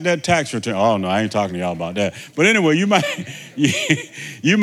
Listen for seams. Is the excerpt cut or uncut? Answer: uncut